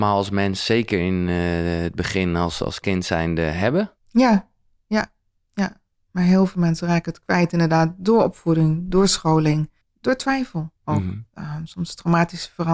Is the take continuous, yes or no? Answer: no